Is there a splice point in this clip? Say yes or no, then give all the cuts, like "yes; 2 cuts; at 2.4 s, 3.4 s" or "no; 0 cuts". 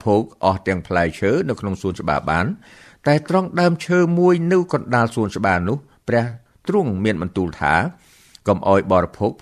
no; 0 cuts